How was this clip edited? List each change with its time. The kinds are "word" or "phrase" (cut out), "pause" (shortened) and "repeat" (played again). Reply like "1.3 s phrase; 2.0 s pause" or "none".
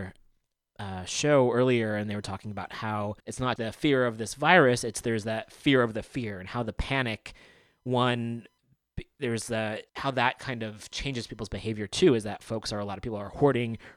3.2 s pause; 3.6 s word; 9.9 s pause